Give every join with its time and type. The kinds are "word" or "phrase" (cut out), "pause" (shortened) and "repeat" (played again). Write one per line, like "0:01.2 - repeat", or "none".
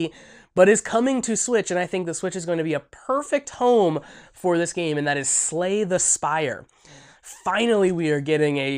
none